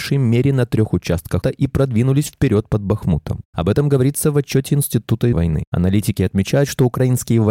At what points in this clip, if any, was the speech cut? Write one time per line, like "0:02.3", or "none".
0:01.4
0:05.3